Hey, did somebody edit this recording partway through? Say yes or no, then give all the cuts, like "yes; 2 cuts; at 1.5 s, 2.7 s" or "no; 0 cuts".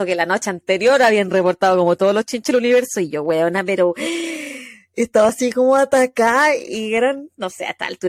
no; 0 cuts